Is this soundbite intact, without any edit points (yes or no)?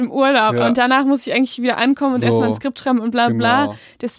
yes